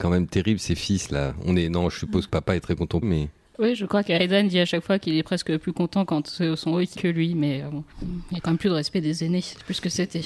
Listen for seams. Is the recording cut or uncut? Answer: cut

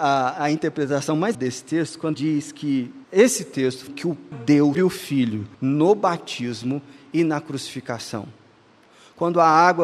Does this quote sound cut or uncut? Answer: cut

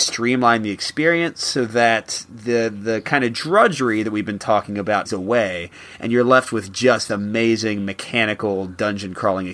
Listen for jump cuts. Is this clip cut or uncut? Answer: cut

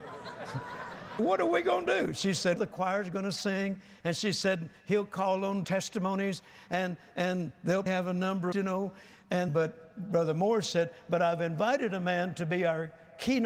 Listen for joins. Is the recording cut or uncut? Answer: cut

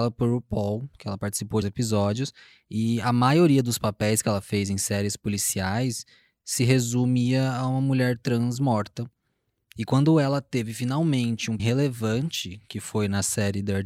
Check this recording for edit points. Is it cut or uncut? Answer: cut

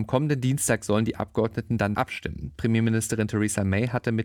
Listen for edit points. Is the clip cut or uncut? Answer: cut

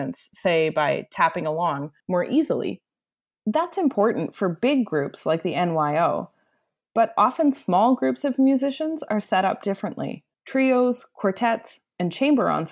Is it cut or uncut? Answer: cut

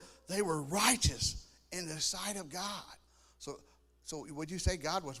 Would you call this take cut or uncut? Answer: uncut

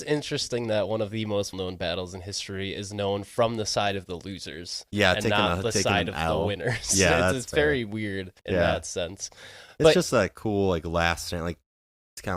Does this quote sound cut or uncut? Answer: cut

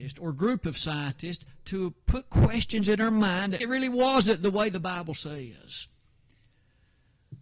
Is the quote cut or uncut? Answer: cut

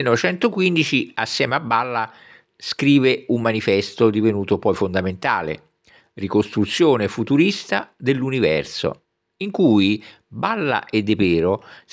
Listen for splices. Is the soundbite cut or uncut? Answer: uncut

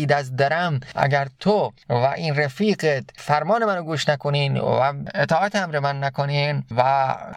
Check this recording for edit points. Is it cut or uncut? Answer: uncut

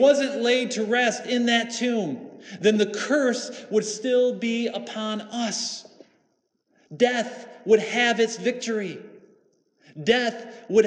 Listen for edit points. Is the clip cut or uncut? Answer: uncut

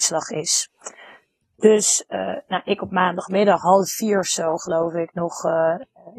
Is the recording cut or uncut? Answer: uncut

